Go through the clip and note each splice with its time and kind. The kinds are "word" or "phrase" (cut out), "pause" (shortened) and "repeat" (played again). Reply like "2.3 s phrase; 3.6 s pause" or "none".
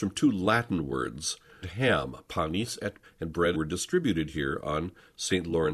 1.6 s phrase; 3.0 s word; 3.5 s phrase